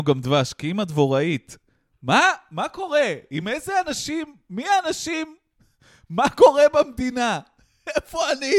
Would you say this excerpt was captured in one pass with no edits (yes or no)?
yes